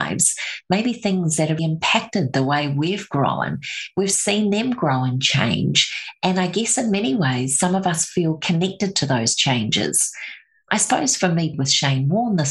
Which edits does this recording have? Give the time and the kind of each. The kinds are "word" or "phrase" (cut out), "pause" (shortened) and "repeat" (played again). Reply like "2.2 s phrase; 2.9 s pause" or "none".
1.6 s word; 11.5 s word